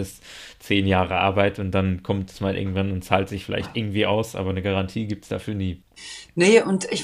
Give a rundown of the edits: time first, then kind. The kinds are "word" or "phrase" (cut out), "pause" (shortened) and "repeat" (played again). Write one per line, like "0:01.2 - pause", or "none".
none